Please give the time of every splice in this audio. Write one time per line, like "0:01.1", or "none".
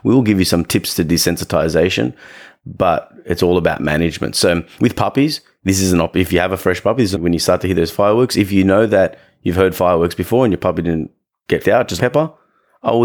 0:07.1
0:11.6
0:12.0